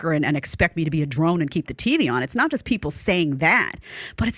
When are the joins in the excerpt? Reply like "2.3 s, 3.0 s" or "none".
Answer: none

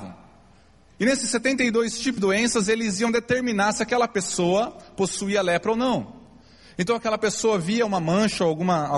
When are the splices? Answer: 2.2 s

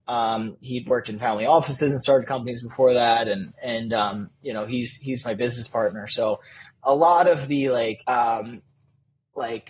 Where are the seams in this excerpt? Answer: 8.0 s

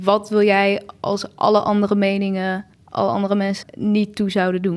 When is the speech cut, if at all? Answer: 2.7 s, 3.6 s

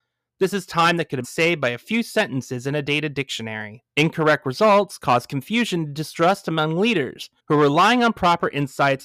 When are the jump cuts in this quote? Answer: 1.2 s, 3.9 s, 7.4 s

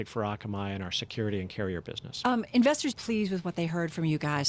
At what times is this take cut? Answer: 2.9 s

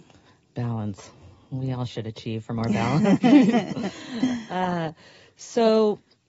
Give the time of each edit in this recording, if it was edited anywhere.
none

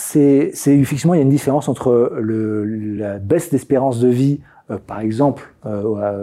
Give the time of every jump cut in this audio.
none

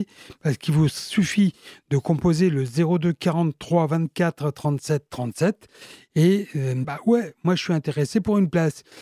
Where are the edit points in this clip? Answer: 6.8 s

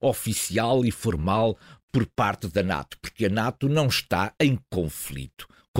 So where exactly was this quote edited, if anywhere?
none

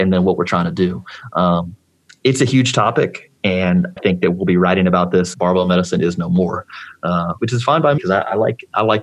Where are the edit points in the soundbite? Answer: 4.0 s, 5.3 s, 7.4 s, 8.0 s

